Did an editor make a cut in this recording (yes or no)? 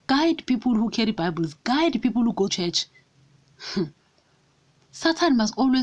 yes